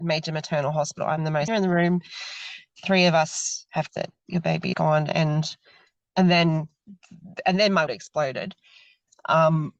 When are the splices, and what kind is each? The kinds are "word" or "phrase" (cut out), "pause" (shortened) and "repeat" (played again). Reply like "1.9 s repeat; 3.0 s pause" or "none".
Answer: 1.5 s word; 3.9 s word; 4.7 s word; 6.1 s word; 7.9 s word